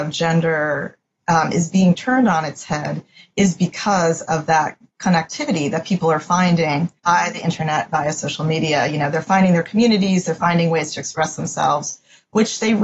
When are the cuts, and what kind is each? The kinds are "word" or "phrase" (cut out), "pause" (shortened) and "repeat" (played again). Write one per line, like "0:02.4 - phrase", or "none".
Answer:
0:07.0 - pause